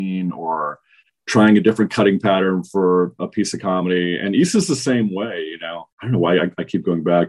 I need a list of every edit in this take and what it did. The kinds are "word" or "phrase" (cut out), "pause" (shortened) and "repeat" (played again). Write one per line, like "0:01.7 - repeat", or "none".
0:05.9 - pause